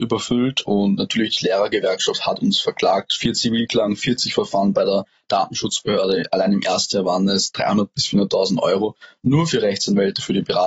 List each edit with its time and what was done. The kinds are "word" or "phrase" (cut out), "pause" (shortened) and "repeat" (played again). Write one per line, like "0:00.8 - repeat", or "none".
none

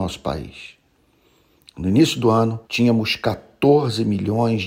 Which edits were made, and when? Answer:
0:02.6 - pause

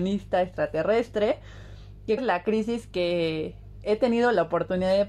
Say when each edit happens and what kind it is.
0:02.2 - phrase

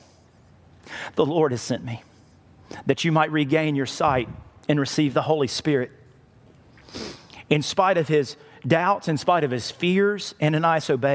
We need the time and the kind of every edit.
none

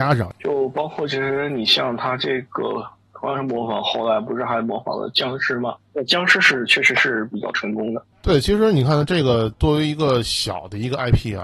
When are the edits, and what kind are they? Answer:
none

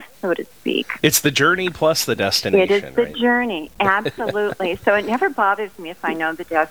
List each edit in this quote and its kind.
none

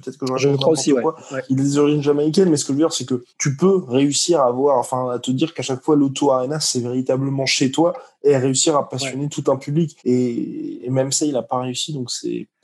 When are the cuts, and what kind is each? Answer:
0:03.3 - pause
0:10.0 - pause

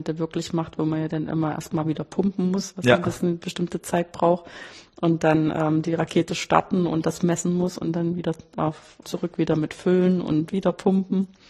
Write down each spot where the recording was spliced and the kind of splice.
0:09.0 - word

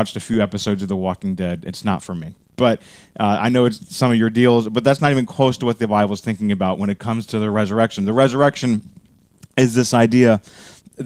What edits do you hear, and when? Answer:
none

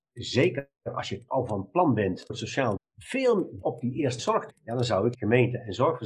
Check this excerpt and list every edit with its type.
0:01.3 - word
0:02.3 - word
0:02.8 - word
0:03.6 - word
0:04.2 - word
0:04.5 - word
0:05.1 - word

